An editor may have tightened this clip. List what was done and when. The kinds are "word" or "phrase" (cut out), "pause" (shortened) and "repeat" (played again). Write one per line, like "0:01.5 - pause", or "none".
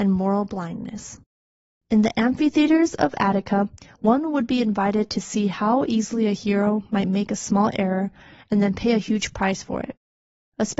none